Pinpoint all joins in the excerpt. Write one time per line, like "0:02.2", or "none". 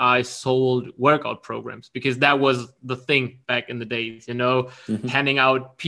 0:03.4